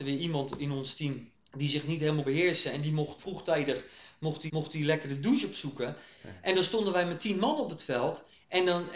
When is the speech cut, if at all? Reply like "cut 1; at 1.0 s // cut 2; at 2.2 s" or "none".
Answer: cut 1; at 1.4 s // cut 2; at 2.2 s // cut 3; at 3.2 s // cut 4; at 4.5 s